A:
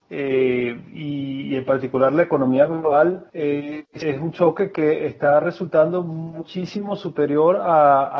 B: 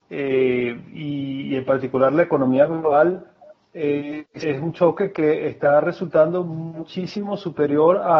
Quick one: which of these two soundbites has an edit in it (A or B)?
A